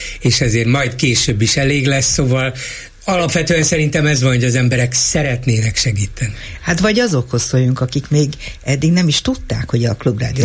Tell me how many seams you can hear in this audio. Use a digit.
1